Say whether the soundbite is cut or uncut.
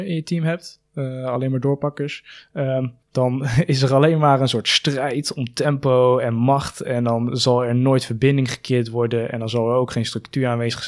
cut